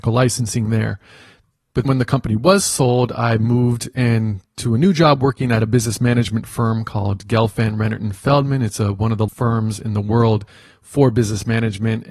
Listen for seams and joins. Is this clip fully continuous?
no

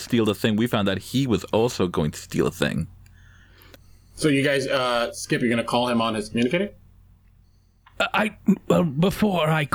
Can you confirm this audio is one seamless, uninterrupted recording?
yes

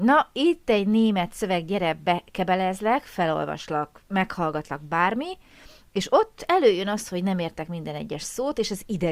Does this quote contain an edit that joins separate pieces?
no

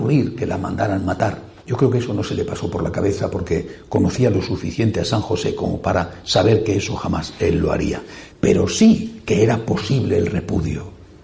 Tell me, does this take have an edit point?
yes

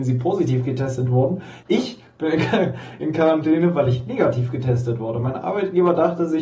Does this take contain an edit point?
yes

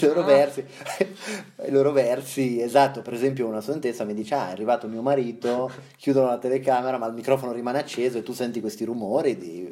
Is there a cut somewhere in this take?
no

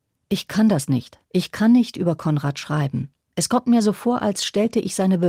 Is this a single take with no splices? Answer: no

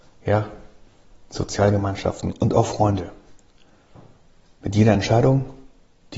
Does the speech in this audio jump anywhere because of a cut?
no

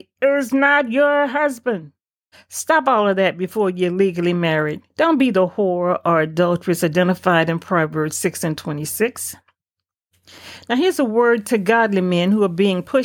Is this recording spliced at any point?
yes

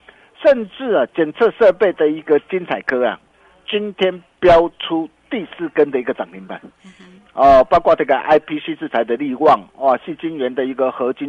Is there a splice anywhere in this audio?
no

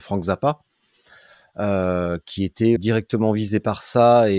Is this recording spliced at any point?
yes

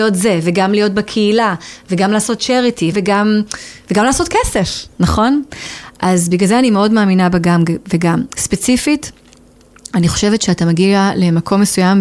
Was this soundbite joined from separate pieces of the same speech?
yes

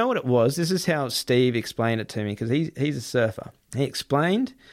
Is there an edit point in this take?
yes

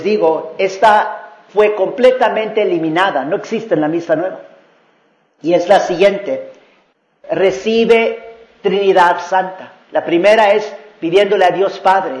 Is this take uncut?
no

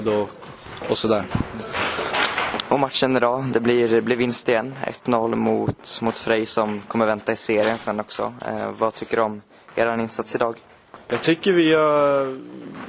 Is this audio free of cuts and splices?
yes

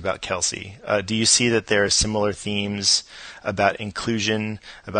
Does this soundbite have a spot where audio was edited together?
no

